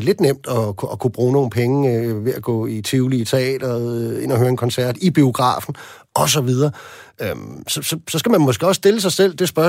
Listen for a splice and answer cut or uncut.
uncut